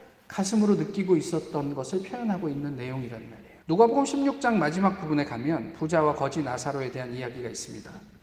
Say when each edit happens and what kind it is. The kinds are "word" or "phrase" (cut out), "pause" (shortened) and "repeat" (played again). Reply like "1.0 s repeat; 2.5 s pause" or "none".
3.6 s pause